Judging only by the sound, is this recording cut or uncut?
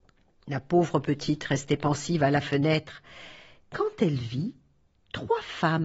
uncut